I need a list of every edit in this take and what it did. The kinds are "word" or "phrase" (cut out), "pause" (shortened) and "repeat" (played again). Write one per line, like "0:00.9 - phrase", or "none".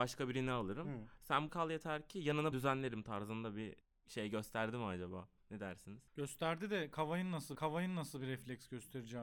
0:01.5 - word
0:02.5 - word
0:03.8 - pause
0:06.1 - pause
0:07.6 - repeat